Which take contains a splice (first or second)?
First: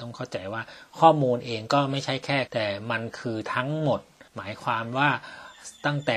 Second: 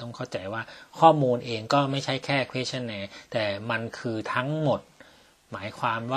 first